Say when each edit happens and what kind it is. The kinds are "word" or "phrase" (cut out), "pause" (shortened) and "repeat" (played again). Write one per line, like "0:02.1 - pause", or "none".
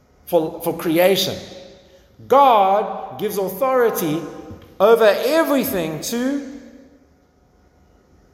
none